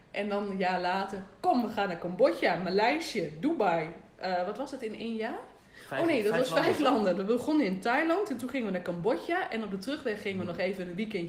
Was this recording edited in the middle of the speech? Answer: no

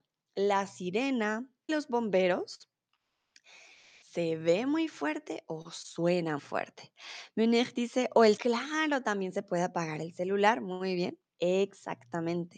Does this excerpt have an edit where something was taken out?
yes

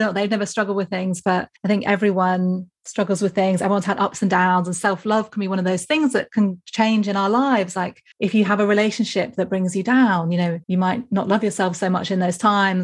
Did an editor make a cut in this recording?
yes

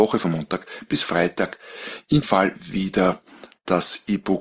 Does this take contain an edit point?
yes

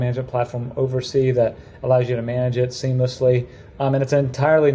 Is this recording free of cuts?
yes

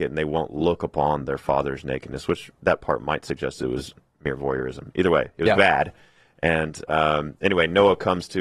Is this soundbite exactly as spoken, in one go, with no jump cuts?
yes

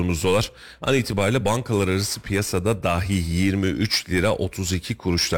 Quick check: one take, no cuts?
yes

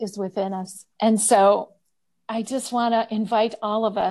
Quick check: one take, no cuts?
no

